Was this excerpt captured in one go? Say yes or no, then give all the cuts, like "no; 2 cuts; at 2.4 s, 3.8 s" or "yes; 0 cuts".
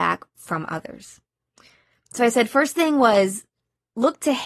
yes; 0 cuts